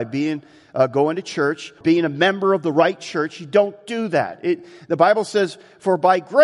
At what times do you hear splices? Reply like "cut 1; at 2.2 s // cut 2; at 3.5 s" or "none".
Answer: cut 1; at 1.8 s